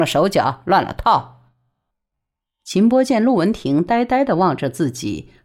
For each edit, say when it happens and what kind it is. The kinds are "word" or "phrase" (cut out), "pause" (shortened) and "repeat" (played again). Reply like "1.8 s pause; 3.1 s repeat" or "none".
1.9 s pause